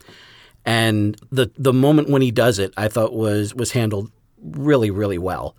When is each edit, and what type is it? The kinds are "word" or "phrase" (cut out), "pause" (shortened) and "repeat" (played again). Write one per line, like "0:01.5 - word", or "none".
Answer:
none